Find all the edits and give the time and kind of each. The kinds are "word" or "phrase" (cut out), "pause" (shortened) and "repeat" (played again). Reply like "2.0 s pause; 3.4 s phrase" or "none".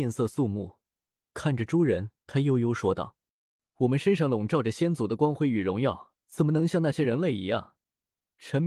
2.2 s pause; 6.2 s pause